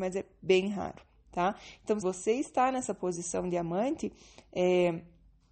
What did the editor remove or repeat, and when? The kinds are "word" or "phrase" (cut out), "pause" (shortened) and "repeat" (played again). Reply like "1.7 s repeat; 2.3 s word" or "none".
2.0 s word